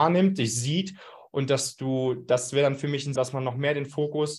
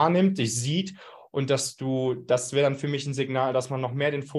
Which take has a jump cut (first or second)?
first